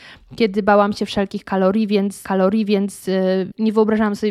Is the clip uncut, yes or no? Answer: no